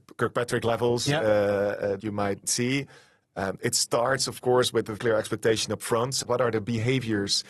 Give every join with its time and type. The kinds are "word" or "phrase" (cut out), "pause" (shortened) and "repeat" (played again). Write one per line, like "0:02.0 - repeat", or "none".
0:02.0 - word
0:05.0 - word
0:06.2 - word